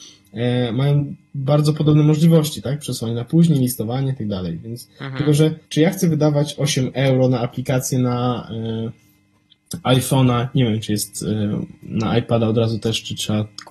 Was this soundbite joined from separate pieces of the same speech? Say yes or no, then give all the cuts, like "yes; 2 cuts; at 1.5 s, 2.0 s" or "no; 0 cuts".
yes; 1 cut; at 5.6 s